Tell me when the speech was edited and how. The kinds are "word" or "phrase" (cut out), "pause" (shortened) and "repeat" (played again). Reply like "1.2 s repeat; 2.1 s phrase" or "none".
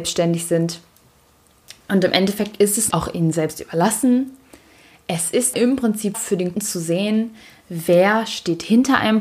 2.9 s word; 5.5 s word; 6.1 s word; 6.5 s word